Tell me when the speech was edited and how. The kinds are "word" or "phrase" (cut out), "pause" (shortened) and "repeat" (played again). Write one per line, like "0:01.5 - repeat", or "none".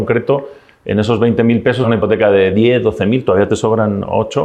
0:01.8 - phrase